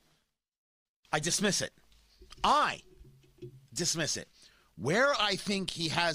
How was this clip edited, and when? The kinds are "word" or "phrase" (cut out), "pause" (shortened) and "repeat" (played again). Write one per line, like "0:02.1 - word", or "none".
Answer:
0:03.7 - pause